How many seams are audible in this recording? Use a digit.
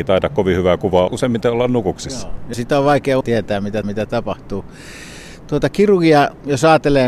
4